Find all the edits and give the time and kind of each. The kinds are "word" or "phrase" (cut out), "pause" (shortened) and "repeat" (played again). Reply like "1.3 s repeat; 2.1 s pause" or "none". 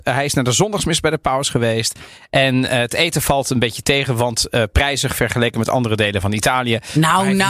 none